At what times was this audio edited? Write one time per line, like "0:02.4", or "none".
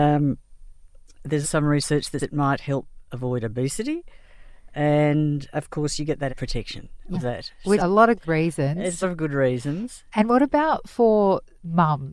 0:01.4
0:02.2
0:05.5
0:06.3
0:07.1
0:07.8
0:08.2
0:09.0